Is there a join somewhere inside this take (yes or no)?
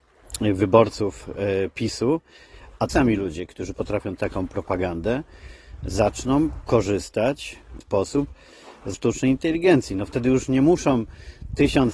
yes